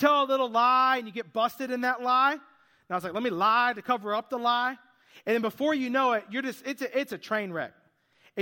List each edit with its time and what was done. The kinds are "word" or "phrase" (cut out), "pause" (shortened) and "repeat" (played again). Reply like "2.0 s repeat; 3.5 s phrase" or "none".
none